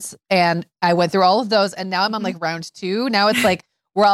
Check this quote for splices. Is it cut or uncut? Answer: uncut